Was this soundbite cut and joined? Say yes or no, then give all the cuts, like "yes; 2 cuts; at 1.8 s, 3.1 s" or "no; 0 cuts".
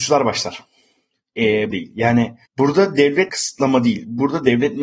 yes; 3 cuts; at 1.7 s, 2.5 s, 3.3 s